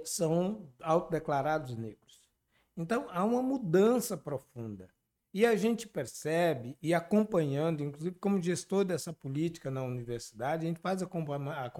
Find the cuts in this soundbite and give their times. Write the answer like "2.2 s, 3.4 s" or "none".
none